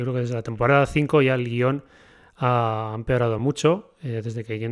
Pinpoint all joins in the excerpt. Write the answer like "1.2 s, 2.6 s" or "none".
none